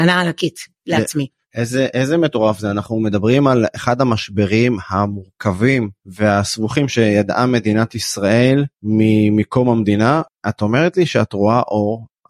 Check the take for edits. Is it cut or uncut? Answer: cut